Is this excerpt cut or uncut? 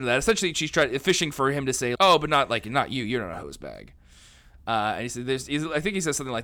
cut